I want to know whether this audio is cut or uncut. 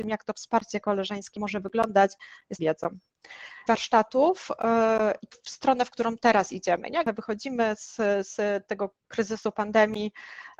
cut